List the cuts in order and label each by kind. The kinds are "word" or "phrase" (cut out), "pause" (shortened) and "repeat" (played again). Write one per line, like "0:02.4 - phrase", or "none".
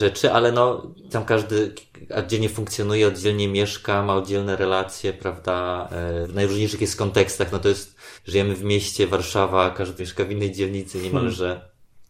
0:01.1 - word
0:06.2 - word
0:08.2 - pause
0:10.0 - word